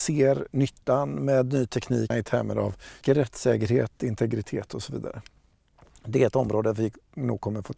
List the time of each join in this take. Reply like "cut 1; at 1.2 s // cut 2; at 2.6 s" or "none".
cut 1; at 2.1 s // cut 2; at 3.0 s